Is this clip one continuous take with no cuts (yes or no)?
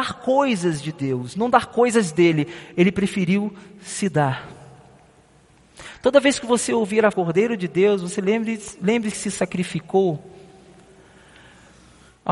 no